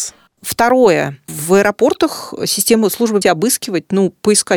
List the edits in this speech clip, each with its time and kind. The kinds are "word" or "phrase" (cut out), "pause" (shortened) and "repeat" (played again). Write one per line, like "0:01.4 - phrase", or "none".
0:03.2 - word